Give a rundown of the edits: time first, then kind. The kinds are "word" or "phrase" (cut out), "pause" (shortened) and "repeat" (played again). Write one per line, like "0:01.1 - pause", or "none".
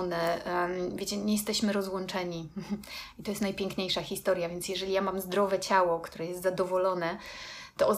none